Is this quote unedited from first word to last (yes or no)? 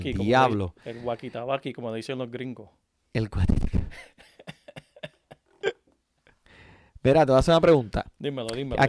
yes